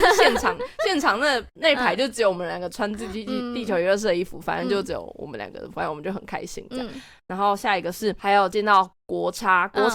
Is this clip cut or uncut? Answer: uncut